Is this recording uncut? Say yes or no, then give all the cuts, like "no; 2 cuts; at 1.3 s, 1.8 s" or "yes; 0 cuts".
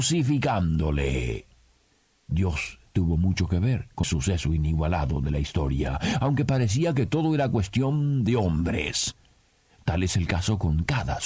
no; 1 cut; at 4.0 s